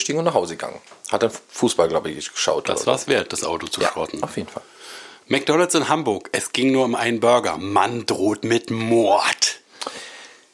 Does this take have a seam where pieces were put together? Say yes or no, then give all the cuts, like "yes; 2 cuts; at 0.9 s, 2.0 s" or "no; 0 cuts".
no; 0 cuts